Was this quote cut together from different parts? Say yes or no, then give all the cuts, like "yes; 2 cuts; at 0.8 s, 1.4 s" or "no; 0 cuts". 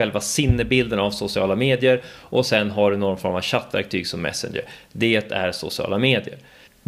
no; 0 cuts